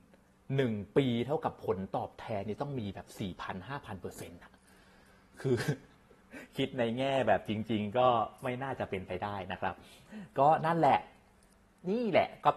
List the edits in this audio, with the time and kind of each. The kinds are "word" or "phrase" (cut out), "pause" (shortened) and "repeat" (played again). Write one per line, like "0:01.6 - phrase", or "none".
none